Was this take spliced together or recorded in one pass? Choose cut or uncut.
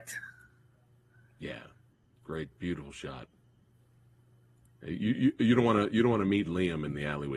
uncut